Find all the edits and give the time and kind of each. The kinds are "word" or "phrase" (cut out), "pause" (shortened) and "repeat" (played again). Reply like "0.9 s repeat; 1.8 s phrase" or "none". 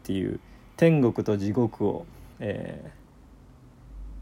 2.3 s pause